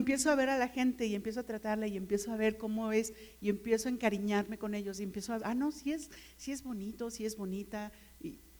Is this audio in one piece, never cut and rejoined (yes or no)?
no